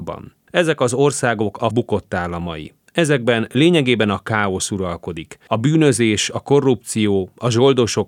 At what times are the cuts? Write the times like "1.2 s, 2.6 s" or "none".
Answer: 1.7 s, 2.8 s